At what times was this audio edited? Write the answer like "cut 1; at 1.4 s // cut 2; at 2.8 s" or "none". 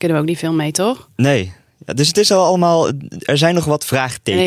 none